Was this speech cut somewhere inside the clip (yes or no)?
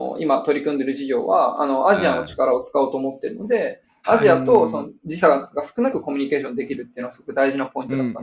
no